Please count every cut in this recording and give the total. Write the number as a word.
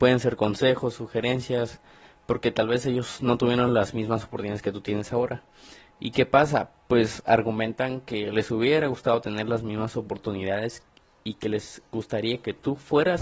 zero